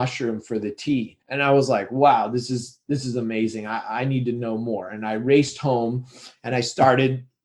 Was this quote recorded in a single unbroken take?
no; 1 cut; at 1.2 s

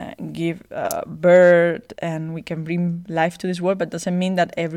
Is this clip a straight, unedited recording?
yes; 0 cuts

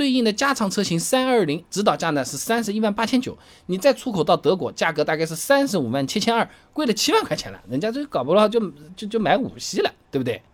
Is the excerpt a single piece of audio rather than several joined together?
no; 1 cut; at 1.6 s

